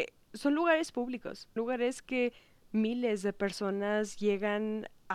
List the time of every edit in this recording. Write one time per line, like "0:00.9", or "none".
0:01.6